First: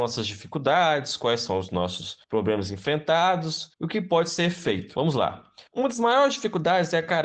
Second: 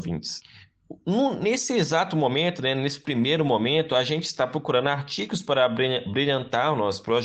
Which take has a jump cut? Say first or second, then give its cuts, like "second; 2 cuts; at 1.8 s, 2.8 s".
first; 3 cuts; at 2.2 s, 3.7 s, 5.7 s